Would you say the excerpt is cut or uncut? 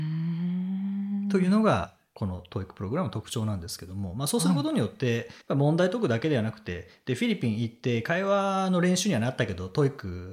cut